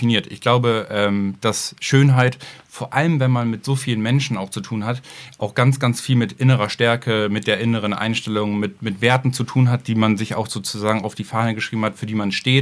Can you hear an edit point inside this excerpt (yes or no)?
no